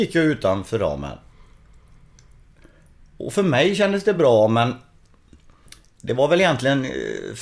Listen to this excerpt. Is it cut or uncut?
uncut